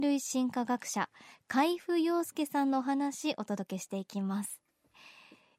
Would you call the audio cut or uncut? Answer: uncut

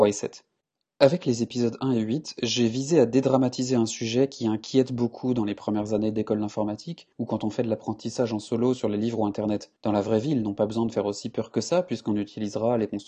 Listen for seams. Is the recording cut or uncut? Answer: cut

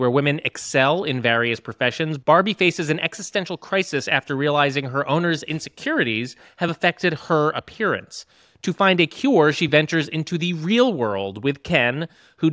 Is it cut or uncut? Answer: uncut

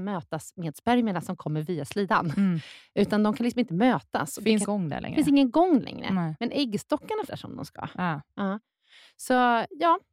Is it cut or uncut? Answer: cut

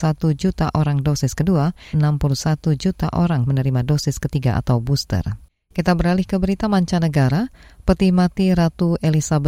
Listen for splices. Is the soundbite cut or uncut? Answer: cut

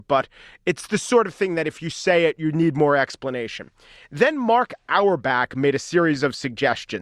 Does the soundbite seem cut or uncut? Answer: uncut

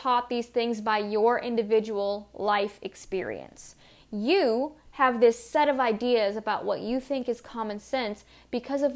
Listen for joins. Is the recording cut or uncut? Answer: uncut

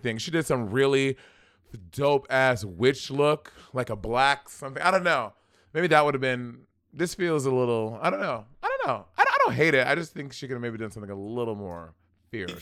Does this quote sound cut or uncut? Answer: uncut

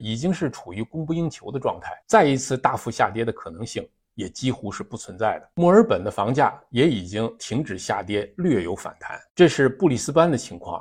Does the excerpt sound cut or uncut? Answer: cut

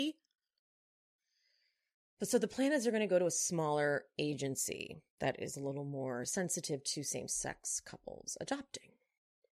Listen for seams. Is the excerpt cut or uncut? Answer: uncut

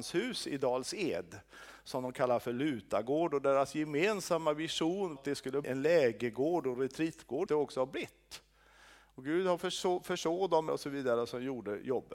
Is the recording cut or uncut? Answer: cut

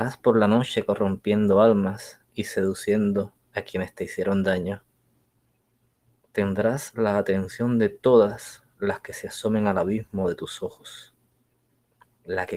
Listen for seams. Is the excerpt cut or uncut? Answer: uncut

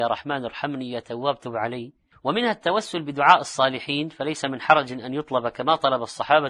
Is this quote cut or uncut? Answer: cut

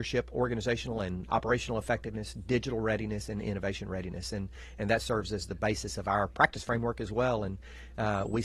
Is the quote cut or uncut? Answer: uncut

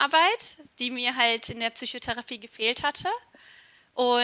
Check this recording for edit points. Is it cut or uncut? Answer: uncut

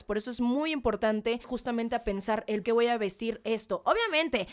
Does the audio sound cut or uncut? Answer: cut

